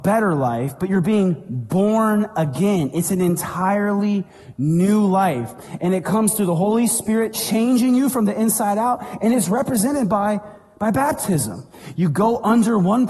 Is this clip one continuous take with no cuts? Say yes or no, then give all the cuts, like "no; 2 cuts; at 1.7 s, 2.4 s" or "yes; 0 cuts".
yes; 0 cuts